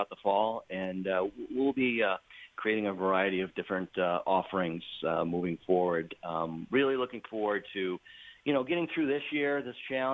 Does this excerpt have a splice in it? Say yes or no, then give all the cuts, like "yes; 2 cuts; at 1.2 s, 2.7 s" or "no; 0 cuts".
no; 0 cuts